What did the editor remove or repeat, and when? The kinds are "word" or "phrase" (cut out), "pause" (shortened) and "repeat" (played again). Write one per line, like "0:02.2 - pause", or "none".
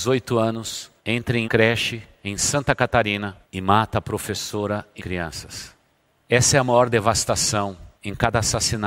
0:01.0 - pause
0:01.4 - word
0:03.4 - pause
0:05.0 - word
0:07.9 - pause